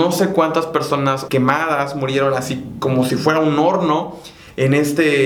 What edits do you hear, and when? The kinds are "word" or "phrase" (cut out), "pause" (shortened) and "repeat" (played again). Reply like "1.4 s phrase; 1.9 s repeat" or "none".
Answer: 1.3 s word